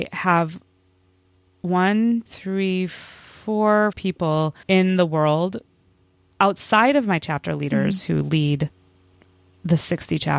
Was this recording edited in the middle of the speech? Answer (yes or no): yes